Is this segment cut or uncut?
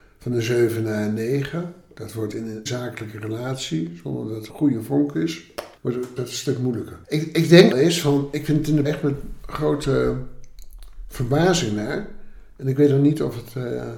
cut